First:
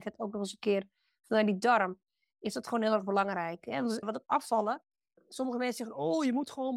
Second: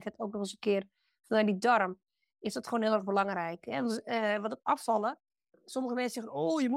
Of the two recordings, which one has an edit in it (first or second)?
first